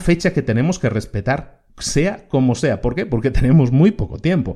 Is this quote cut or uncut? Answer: cut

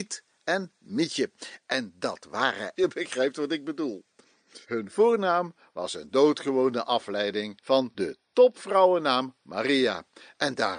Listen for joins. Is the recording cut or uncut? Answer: cut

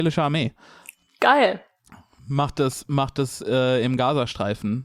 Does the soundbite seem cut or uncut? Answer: uncut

